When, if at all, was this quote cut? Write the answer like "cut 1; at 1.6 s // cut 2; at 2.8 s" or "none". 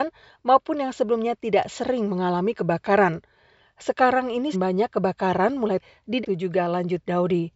cut 1; at 4.5 s // cut 2; at 5.8 s // cut 3; at 6.2 s